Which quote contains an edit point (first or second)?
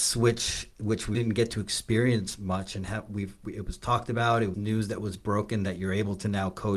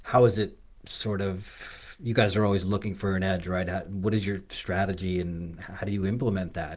first